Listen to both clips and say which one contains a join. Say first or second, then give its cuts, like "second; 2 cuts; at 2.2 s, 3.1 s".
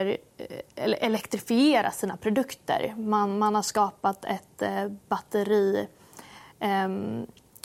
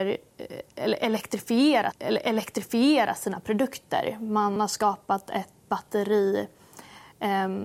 second; 3 cuts; at 1.9 s, 4.6 s, 5.6 s